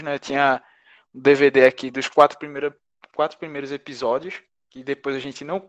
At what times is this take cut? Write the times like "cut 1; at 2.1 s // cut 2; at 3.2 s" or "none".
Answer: none